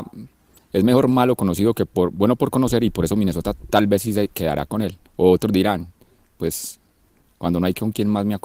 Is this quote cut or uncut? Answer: cut